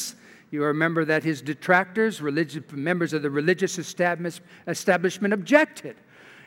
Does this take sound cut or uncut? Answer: uncut